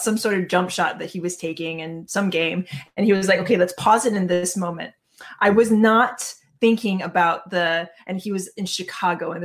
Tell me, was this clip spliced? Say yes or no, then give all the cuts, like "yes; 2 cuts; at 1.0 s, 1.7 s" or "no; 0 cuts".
no; 0 cuts